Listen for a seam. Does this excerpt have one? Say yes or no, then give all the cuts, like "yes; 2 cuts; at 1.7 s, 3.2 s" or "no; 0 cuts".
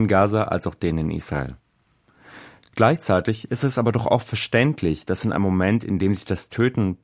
no; 0 cuts